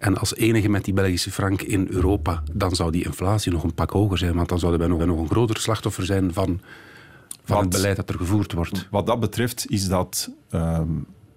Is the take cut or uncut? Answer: cut